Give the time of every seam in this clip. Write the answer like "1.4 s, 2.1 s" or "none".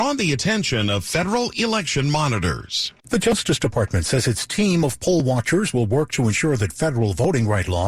3.0 s

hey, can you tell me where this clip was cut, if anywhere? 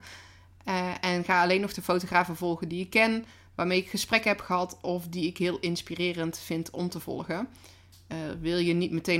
none

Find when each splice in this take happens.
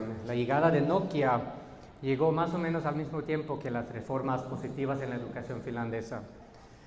none

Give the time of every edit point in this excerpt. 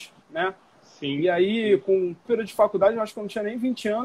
2.3 s

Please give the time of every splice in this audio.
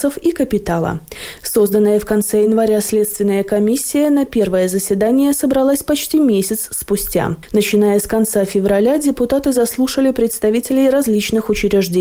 none

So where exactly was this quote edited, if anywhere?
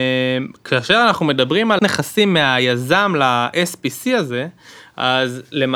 1.8 s

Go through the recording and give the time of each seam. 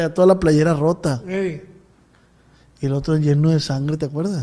none

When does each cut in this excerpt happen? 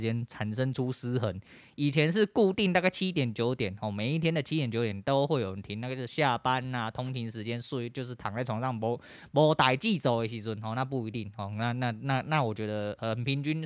none

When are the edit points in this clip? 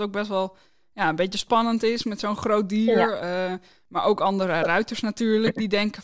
none

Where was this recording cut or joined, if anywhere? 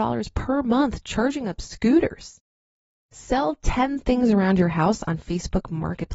none

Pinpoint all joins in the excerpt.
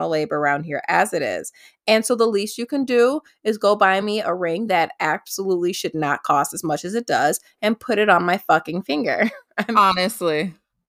none

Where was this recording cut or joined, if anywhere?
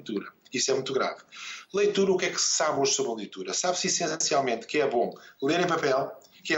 none

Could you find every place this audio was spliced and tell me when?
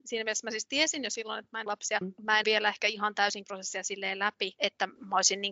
1.7 s, 2.0 s, 2.4 s, 3.4 s

